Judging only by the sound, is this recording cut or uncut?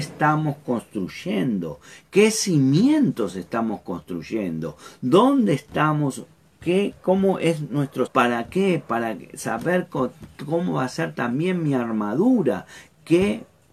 cut